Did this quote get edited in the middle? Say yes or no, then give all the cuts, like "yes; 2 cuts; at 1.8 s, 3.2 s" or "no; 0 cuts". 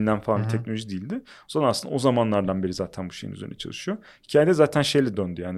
no; 0 cuts